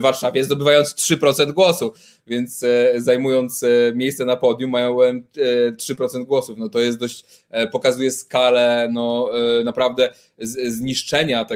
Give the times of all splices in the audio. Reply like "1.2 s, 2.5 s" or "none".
none